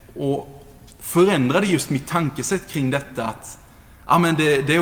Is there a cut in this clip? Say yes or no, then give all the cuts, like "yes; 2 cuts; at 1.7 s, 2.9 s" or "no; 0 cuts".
no; 0 cuts